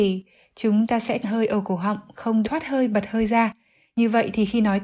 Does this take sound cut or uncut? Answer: cut